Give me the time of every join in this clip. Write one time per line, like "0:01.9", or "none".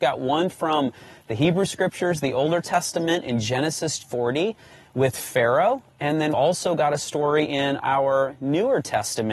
0:04.0
0:06.3